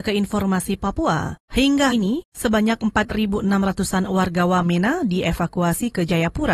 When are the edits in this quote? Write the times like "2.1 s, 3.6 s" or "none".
1.9 s